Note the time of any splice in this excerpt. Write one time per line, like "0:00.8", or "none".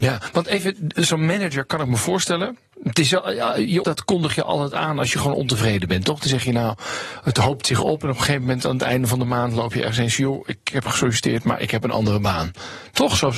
0:03.8